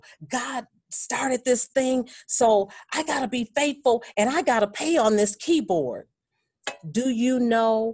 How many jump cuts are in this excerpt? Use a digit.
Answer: 0